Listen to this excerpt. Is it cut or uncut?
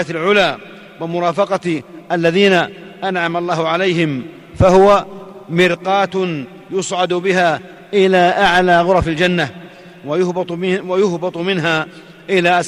uncut